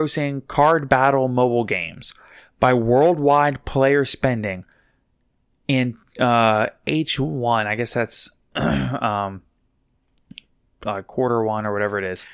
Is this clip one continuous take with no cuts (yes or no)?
yes